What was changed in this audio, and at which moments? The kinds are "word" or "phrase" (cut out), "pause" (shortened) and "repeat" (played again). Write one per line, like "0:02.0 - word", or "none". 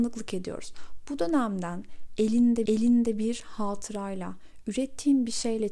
0:02.7 - repeat